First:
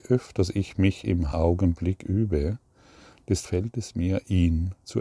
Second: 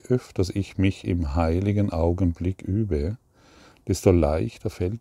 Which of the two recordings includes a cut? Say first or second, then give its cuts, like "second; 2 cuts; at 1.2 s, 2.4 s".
first; 2 cuts; at 1.3 s, 3.4 s